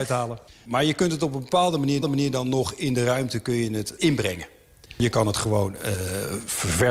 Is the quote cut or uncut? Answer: cut